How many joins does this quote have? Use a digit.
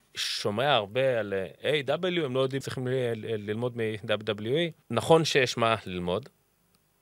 2